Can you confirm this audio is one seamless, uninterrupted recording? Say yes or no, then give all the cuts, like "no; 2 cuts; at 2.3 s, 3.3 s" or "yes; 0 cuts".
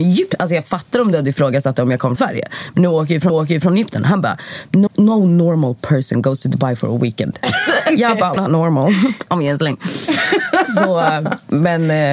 no; 4 cuts; at 2.2 s, 3.3 s, 4.9 s, 8.4 s